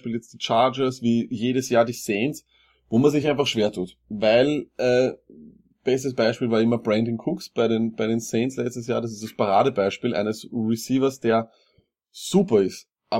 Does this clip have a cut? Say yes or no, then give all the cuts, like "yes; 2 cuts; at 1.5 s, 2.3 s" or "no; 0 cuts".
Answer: no; 0 cuts